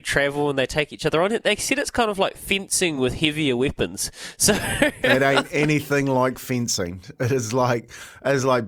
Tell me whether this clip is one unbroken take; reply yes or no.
yes